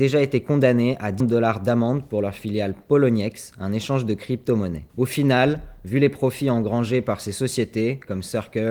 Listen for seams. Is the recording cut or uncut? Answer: cut